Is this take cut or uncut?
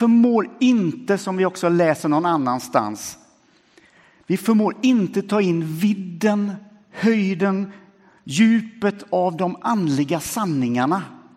uncut